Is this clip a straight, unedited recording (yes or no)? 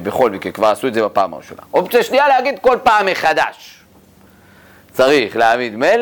yes